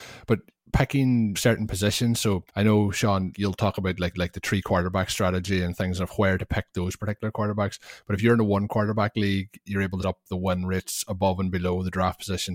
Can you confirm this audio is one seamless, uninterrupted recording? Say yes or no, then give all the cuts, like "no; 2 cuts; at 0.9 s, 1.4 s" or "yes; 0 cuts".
no; 5 cuts; at 1.3 s, 2.5 s, 3.3 s, 4.1 s, 10.0 s